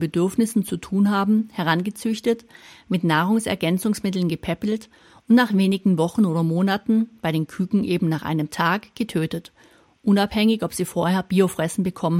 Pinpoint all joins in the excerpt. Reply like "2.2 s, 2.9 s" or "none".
none